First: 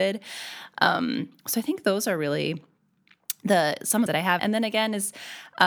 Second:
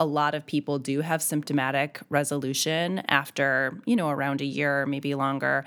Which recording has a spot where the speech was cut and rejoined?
first; 2 cuts; at 4.1 s, 4.4 s

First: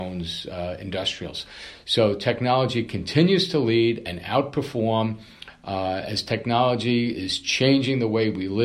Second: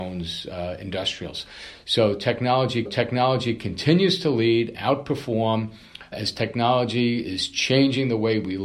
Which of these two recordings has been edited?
second; 3 cuts; at 2.9 s, 4.7 s, 6.1 s

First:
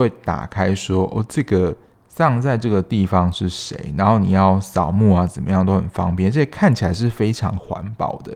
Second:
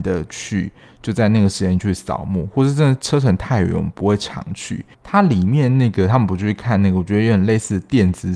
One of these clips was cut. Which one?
second; 1 cut; at 4.9 s

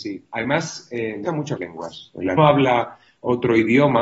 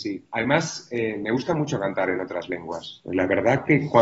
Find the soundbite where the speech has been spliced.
first; 3 cuts; at 1.2 s, 1.6 s, 2.4 s

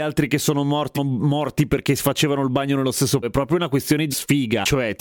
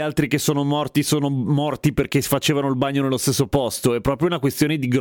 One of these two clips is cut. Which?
first; 3 cuts; at 0.9 s, 3.2 s, 4.1 s

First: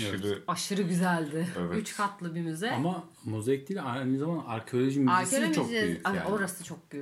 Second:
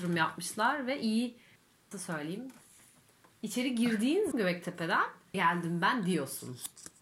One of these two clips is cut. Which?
second; 3 cuts; at 1.9 s, 4.3 s, 5.3 s

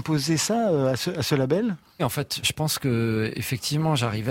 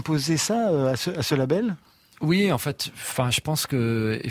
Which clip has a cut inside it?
first; 2 cuts; at 2.0 s, 2.4 s

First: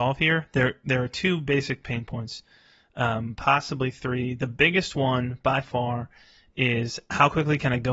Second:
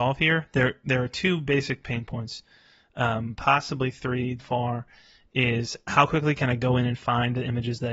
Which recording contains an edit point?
second; 1 cut; at 4.4 s

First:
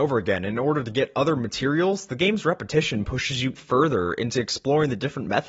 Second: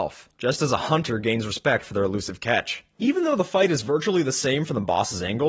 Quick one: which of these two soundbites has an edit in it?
first; 1 cut; at 3.6 s

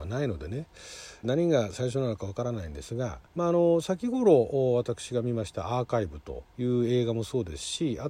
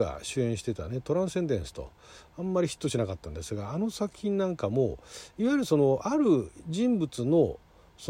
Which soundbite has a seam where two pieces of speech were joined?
first; 3 cuts; at 1.2 s, 3.3 s, 6.5 s

